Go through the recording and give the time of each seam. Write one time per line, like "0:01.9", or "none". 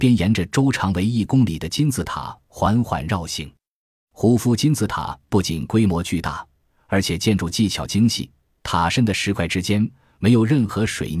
none